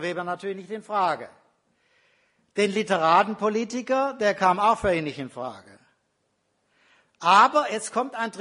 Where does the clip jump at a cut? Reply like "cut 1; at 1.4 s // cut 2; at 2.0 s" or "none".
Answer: none